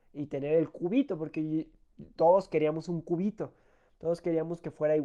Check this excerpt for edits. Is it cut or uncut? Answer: uncut